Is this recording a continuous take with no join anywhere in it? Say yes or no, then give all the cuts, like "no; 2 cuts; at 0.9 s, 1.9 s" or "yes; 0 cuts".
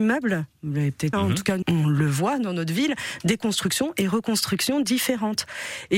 no; 2 cuts; at 1.1 s, 1.6 s